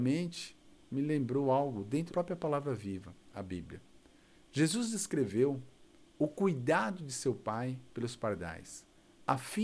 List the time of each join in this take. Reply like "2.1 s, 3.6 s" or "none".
2.1 s